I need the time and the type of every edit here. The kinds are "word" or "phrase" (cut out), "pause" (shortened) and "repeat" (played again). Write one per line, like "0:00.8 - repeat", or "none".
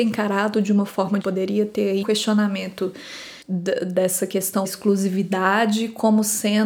0:01.2 - word
0:02.0 - word
0:03.4 - pause
0:04.6 - word